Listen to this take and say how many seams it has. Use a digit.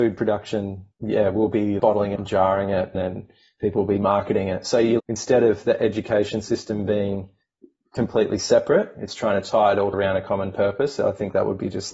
6